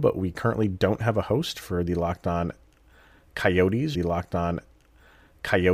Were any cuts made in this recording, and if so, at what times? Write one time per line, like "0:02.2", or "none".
0:03.9